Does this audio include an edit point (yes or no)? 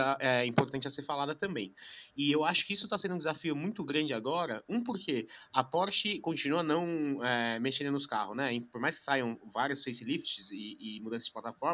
no